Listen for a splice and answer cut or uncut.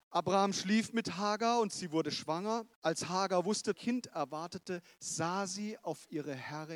cut